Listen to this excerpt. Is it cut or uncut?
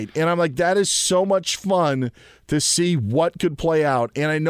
uncut